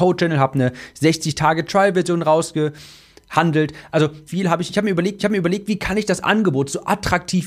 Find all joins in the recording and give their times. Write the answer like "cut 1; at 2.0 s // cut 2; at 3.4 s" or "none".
cut 1; at 4.3 s // cut 2; at 5.2 s